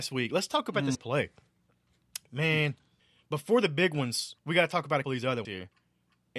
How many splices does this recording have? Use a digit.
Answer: 5